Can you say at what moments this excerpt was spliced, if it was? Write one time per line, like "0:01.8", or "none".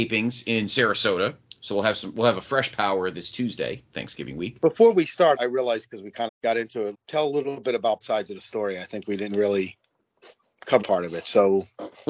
0:01.5
0:05.4
0:06.3
0:06.9
0:08.0
0:10.8